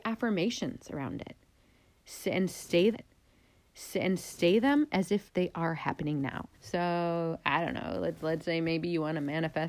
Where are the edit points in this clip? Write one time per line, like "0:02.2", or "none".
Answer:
0:02.9
0:06.5